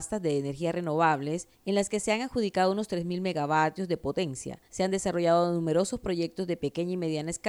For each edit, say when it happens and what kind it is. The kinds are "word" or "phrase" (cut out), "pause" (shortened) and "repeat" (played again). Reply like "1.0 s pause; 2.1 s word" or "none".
1.5 s pause; 4.7 s pause